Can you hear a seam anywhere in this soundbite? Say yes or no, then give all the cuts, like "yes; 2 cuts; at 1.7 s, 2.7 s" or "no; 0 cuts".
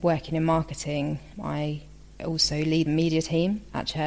yes; 2 cuts; at 1.3 s, 2.9 s